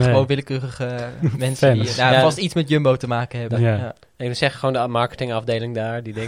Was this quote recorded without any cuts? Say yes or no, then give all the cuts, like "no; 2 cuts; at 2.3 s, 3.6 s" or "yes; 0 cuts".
yes; 0 cuts